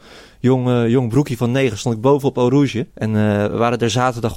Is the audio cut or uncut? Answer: cut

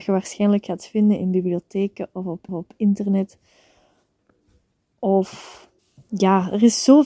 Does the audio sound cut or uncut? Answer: cut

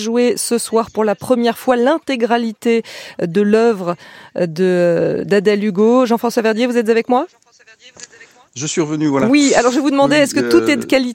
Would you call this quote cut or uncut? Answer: uncut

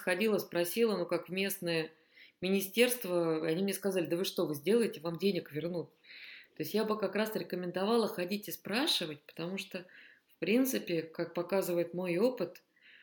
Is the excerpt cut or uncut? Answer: uncut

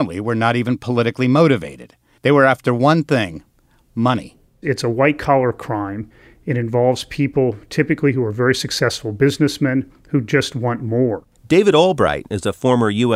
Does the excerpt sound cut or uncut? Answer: uncut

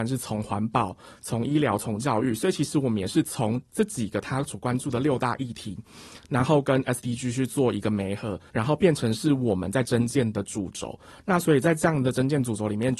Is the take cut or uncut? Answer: cut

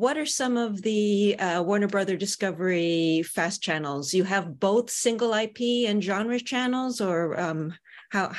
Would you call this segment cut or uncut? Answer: uncut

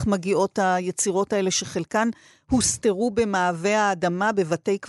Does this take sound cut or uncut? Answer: uncut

